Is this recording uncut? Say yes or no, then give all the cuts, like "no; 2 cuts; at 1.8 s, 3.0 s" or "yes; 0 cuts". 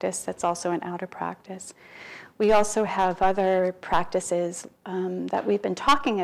yes; 0 cuts